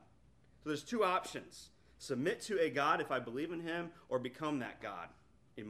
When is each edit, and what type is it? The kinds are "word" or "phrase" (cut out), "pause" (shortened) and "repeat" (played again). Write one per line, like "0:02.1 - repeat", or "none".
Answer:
none